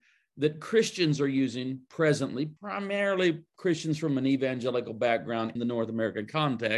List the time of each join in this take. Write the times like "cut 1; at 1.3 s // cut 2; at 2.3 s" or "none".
cut 1; at 2.6 s // cut 2; at 5.6 s